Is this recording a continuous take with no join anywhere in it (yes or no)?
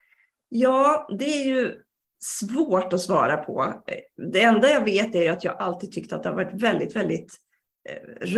yes